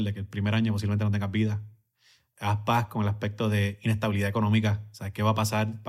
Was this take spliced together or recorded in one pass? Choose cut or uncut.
uncut